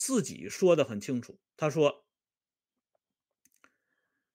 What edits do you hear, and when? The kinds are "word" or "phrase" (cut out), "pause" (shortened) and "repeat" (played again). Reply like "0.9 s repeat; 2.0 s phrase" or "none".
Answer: 1.5 s pause